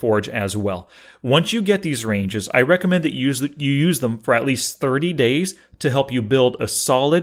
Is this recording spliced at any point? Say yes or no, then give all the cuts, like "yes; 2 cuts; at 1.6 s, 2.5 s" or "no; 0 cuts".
no; 0 cuts